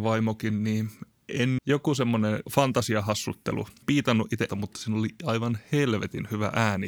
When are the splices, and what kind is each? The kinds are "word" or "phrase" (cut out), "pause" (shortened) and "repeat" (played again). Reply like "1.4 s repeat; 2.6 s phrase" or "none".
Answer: 1.6 s phrase; 2.5 s word; 3.8 s phrase; 4.5 s word